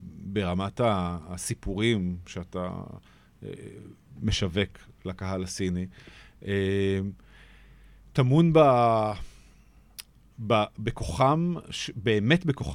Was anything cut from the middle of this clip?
no; 0 cuts

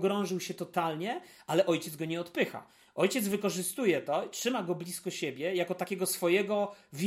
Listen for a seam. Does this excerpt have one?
no; 0 cuts

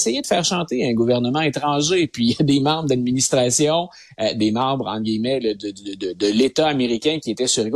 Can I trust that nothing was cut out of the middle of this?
yes; 0 cuts

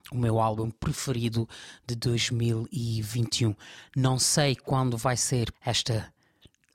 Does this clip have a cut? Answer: yes; 1 cut; at 5.5 s

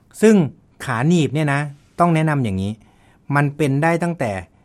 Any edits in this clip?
no; 0 cuts

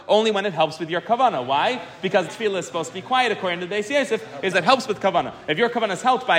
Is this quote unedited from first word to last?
no; 2 cuts; at 2.3 s, 4.5 s

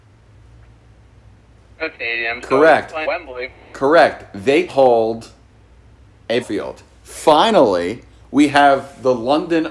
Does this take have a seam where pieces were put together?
yes; 4 cuts; at 1.9 s, 3.0 s, 4.7 s, 6.4 s

